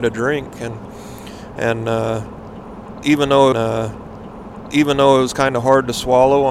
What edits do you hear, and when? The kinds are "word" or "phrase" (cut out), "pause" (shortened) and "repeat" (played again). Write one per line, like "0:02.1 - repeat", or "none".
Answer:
0:03.5 - repeat